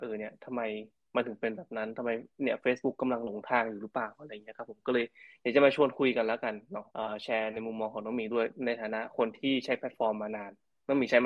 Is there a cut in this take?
no; 0 cuts

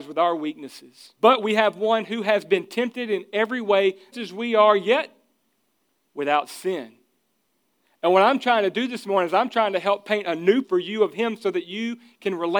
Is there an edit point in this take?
yes; 3 cuts; at 1.2 s, 4.1 s, 10.6 s

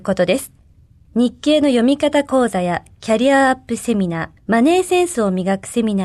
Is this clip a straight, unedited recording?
no; 1 cut; at 4.4 s

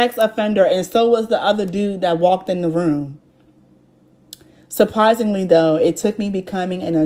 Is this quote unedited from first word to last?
yes; 0 cuts

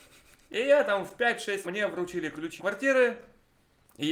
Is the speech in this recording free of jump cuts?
no; 2 cuts; at 1.6 s, 2.6 s

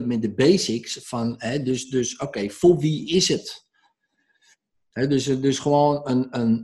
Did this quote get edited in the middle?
no; 0 cuts

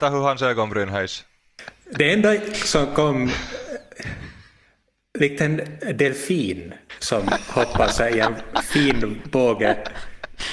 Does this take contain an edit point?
no; 0 cuts

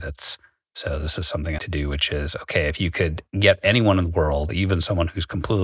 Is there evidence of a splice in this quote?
yes; 1 cut; at 1.6 s

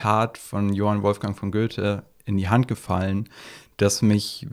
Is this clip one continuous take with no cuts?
yes; 0 cuts

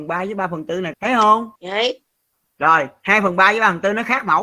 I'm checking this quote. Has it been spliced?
yes; 2 cuts; at 0.9 s, 1.6 s

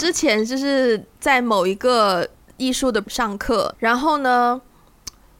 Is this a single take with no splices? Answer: no; 3 cuts; at 2.3 s, 3.0 s, 3.8 s

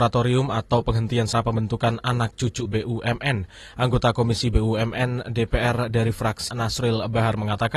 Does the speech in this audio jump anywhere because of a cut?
yes; 3 cuts; at 1.3 s, 2.7 s, 6.5 s

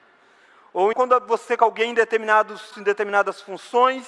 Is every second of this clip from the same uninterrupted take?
no; 3 cuts; at 0.9 s, 1.6 s, 2.7 s

